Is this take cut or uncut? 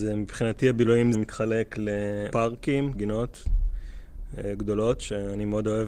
cut